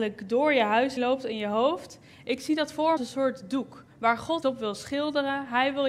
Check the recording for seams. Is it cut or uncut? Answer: cut